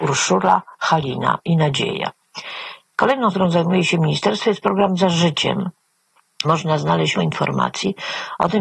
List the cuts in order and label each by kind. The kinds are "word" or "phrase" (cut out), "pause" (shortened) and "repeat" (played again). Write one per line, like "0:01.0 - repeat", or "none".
0:03.3 - word
0:06.4 - word
0:07.1 - word